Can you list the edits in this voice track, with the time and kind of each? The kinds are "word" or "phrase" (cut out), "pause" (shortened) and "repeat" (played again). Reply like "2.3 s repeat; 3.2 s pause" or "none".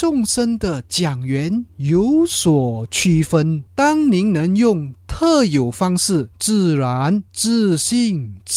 3.7 s pause; 6.3 s pause; 7.3 s pause